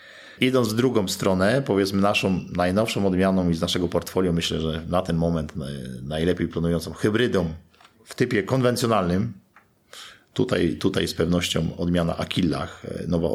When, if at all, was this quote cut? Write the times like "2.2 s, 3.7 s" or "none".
none